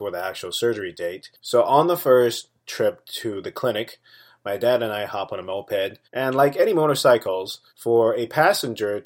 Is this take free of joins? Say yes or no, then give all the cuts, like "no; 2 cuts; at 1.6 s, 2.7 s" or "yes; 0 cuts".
no; 3 cuts; at 1.4 s, 6.0 s, 7.7 s